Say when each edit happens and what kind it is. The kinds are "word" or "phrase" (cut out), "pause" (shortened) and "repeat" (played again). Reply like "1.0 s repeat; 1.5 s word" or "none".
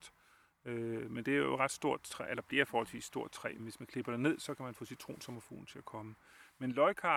3.6 s word